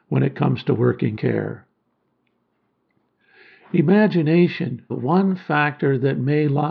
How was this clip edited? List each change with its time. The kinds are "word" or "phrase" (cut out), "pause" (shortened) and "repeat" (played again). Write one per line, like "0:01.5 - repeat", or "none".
0:01.2 - word
0:04.9 - phrase